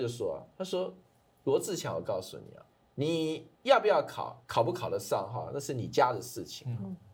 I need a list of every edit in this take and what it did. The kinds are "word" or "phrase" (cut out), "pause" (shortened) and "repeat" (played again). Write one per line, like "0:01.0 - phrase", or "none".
0:02.7 - pause